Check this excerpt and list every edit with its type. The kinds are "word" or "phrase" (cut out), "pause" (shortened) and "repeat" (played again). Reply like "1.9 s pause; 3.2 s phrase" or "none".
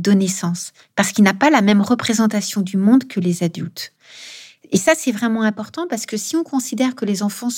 none